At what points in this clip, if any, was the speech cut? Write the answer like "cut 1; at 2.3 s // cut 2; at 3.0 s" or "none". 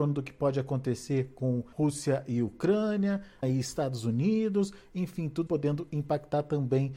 cut 1; at 1.7 s // cut 2; at 3.4 s // cut 3; at 5.5 s